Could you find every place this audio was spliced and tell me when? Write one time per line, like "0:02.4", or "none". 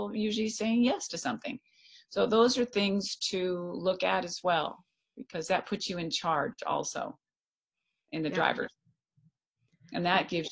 none